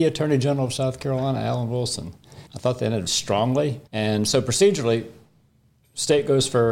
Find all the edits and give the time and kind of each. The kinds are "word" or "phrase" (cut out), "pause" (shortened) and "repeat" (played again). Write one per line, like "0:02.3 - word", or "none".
0:02.5 - pause
0:03.1 - word
0:03.9 - pause